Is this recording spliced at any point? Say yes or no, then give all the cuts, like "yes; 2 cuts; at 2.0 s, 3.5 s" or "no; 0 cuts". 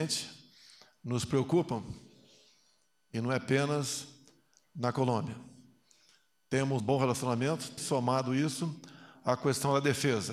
yes; 2 cuts; at 6.8 s, 7.8 s